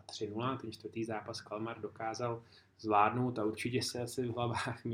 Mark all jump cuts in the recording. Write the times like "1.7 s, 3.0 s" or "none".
none